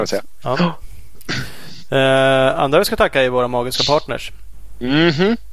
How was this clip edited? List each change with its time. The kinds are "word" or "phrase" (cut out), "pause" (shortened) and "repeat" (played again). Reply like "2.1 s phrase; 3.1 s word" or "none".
none